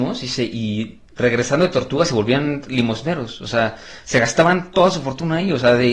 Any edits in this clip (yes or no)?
yes